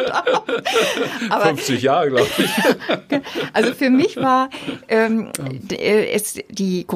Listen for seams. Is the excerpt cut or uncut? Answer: uncut